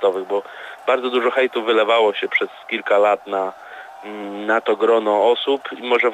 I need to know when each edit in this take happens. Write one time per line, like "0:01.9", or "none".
none